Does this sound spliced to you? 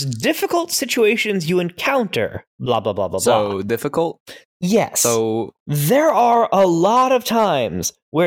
no; 0 cuts

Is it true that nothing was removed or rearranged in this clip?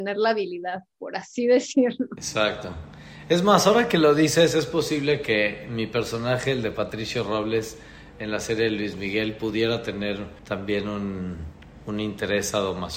no; 2 cuts; at 10.4 s, 11.8 s

